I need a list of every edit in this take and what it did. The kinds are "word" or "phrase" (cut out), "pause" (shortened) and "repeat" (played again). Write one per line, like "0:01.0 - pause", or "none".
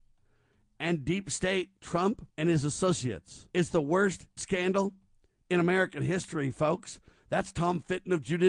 0:01.8 - phrase
0:02.3 - pause
0:03.5 - pause
0:04.4 - phrase